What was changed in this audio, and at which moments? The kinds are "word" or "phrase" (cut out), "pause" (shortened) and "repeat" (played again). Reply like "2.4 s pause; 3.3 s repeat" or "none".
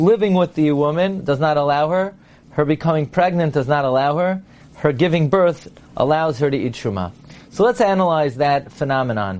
none

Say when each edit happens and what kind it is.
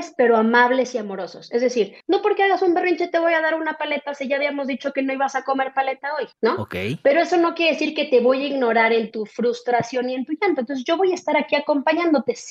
2.0 s pause; 6.3 s pause

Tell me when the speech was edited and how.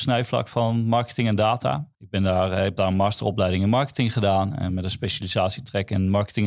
1.9 s pause

